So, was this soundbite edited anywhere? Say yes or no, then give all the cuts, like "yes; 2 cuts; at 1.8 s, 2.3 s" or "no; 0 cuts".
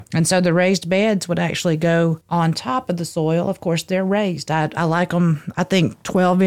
no; 0 cuts